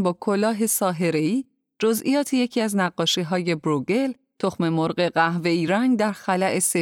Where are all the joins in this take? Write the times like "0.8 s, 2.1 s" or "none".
none